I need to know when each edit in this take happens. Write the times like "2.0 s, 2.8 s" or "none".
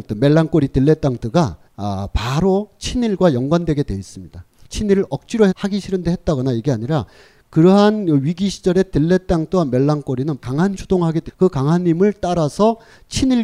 1.7 s, 4.6 s, 5.5 s, 10.4 s, 10.7 s, 11.3 s